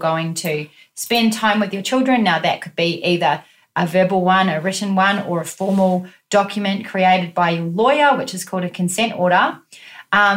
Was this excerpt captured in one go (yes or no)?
yes